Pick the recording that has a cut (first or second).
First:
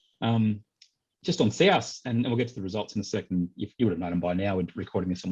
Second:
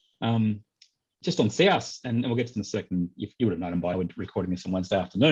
second